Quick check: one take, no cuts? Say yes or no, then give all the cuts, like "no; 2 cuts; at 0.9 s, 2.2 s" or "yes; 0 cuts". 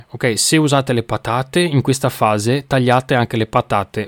yes; 0 cuts